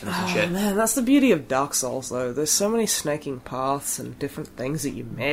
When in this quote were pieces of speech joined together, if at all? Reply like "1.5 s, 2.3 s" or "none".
none

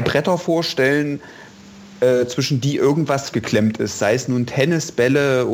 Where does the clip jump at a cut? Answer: 3.3 s

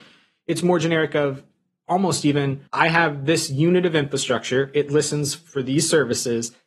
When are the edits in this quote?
2.7 s

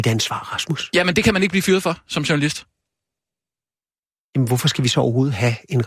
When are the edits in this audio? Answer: none

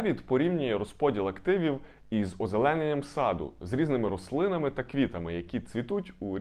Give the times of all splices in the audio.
none

